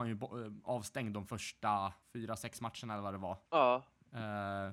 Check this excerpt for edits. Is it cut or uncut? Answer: cut